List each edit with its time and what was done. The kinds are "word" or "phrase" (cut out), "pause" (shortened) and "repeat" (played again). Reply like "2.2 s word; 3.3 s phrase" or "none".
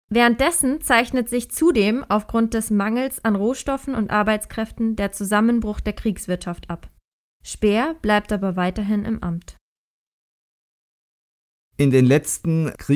none